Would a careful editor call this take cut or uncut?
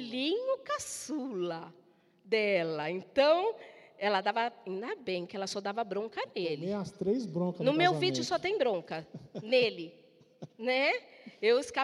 uncut